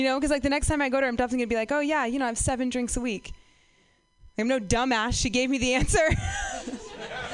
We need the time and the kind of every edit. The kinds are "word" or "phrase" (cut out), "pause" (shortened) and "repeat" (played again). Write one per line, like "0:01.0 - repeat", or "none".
none